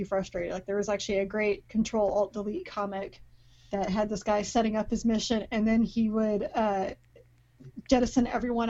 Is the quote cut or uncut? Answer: uncut